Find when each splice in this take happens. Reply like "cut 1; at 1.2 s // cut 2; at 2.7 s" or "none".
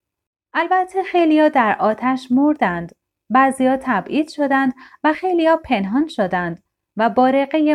none